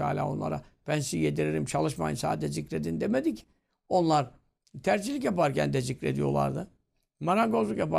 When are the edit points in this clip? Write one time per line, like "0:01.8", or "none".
none